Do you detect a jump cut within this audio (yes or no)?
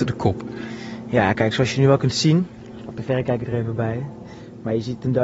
no